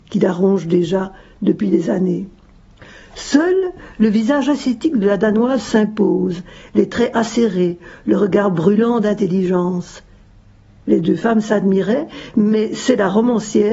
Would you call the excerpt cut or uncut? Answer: uncut